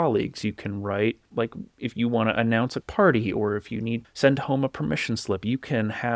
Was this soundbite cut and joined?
yes; 3 cuts; at 1.2 s, 2.8 s, 4.0 s

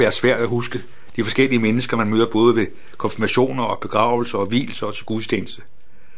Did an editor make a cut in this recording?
no; 0 cuts

